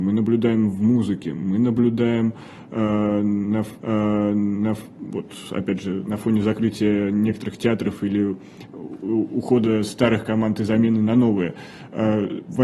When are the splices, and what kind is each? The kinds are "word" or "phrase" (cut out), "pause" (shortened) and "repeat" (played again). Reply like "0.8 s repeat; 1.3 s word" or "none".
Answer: 3.8 s repeat